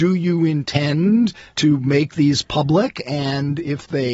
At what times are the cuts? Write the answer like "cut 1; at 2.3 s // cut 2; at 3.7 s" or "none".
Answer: none